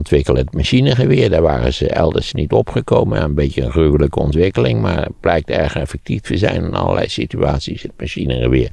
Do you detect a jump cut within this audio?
no; 0 cuts

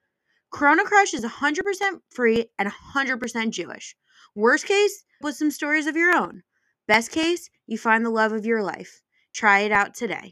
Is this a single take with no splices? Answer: no; 1 cut; at 5.2 s

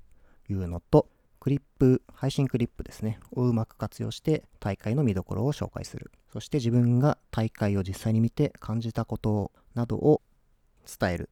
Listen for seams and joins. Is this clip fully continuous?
no; 4 cuts; at 1.3 s, 2.0 s, 4.5 s, 6.2 s

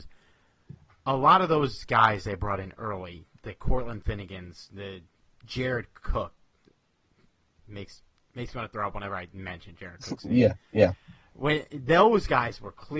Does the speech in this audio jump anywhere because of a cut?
no; 0 cuts

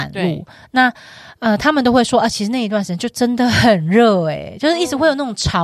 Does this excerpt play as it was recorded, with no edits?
yes; 0 cuts

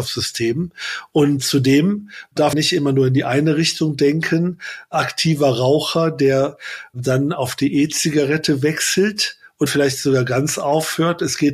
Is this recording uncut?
no; 2 cuts; at 2.5 s, 9.7 s

